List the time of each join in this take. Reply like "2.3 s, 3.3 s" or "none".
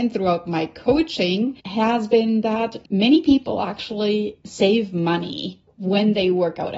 1.6 s, 2.9 s